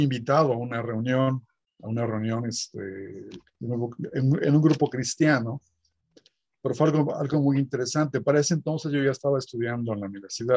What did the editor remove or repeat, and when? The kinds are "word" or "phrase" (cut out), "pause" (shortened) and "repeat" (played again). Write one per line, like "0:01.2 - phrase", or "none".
none